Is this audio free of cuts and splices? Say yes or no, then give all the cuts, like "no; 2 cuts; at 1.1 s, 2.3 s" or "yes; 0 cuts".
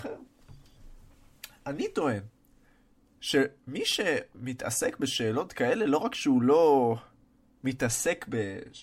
yes; 0 cuts